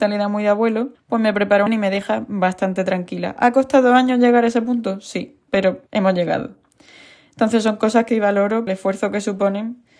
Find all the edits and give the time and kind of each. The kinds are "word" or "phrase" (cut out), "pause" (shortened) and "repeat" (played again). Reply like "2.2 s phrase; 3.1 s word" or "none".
0.9 s pause; 1.7 s phrase; 5.9 s pause; 8.1 s word; 8.7 s phrase